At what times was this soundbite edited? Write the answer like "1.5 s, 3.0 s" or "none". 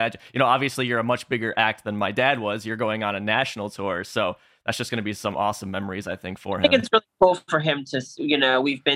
none